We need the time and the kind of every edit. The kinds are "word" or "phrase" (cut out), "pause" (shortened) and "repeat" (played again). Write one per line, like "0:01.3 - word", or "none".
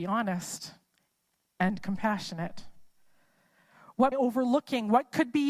0:04.1 - phrase